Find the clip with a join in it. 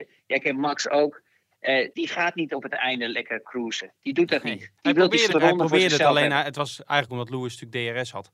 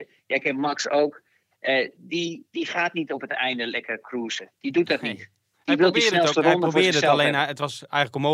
first; 4 cuts; at 1.9 s, 4.8 s, 5.3 s, 7.1 s

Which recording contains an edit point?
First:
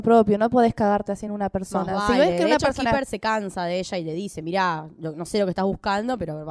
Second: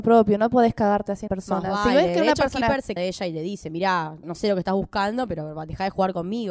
second; 3 cuts; at 1.3 s, 3.0 s, 4.2 s

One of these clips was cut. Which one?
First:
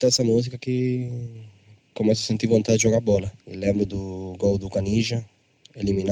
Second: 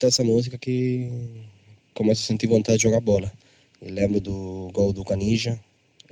first; 1 cut; at 3.4 s

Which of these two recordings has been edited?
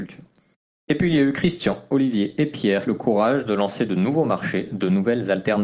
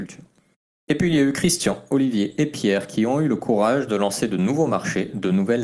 first; 1 cut; at 2.9 s

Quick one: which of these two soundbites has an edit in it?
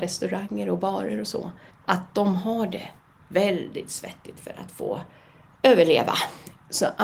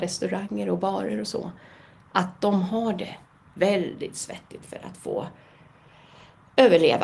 first; 2 cuts; at 1.7 s, 5.5 s

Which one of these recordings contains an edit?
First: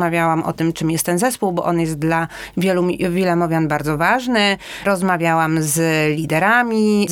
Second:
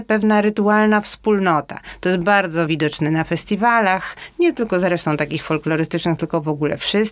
second; 1 cut; at 2.7 s

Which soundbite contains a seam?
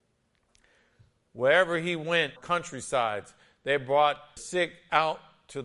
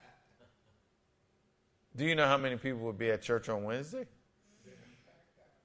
first; 2 cuts; at 2.4 s, 4.4 s

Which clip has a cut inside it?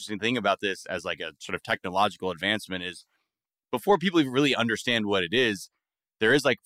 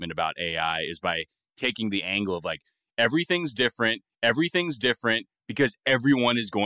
second; 1 cut; at 4.1 s

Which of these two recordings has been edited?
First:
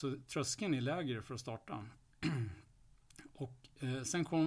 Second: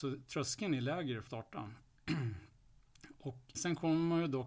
second; 2 cuts; at 1.3 s, 3.5 s

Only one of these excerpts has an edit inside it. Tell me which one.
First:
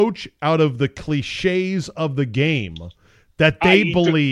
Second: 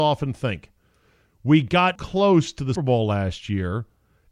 second; 2 cuts; at 2.0 s, 2.8 s

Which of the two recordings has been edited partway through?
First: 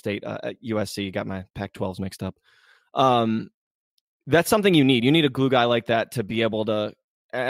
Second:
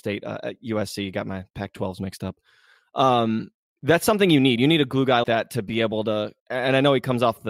second; 3 cuts; at 3.7 s, 5.2 s, 6.4 s

